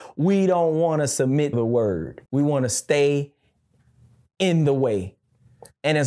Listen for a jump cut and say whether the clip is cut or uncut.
cut